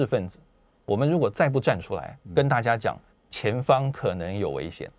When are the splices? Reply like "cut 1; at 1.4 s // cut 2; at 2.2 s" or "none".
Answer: cut 1; at 2.2 s // cut 2; at 3.1 s